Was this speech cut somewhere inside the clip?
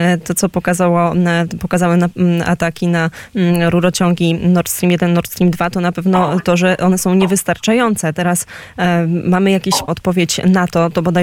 yes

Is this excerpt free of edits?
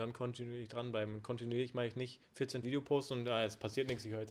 no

